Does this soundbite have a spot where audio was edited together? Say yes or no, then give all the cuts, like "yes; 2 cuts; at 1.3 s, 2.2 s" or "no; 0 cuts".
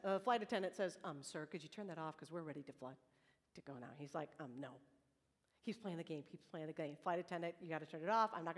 no; 0 cuts